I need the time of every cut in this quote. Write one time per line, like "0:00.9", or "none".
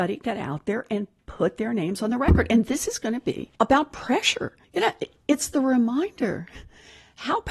0:03.6
0:04.6